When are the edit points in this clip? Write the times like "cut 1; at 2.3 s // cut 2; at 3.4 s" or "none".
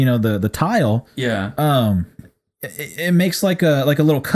none